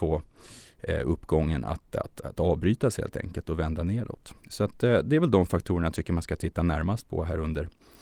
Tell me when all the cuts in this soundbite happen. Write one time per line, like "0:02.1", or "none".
0:04.4